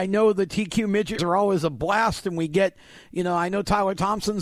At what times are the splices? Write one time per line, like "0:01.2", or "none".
0:01.2